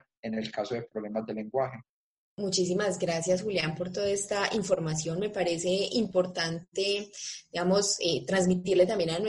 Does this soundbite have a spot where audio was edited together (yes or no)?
no